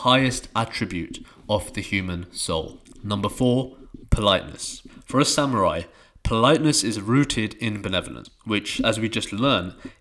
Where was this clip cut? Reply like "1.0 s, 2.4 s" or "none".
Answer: none